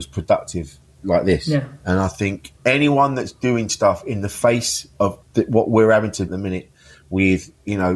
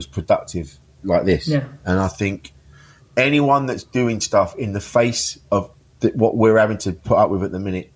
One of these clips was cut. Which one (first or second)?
first